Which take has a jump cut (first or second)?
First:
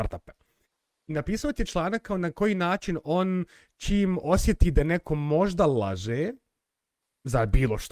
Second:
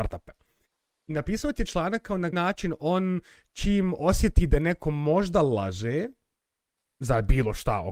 second